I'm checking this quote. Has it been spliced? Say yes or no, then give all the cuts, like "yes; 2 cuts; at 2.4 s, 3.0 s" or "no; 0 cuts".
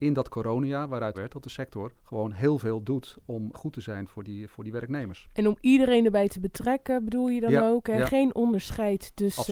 yes; 3 cuts; at 1.1 s, 2.0 s, 3.5 s